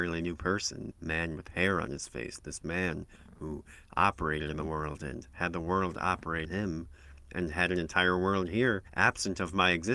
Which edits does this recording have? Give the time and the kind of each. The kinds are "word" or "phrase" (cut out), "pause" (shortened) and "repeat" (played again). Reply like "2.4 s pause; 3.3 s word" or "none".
0.9 s word; 6.5 s word